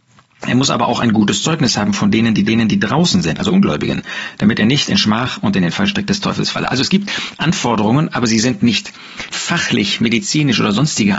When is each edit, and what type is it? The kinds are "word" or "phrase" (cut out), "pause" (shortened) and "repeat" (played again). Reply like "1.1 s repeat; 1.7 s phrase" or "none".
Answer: 2.5 s repeat; 9.3 s word